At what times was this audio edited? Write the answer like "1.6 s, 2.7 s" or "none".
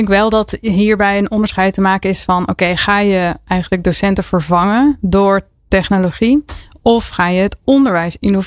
none